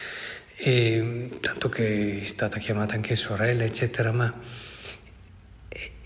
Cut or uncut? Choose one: uncut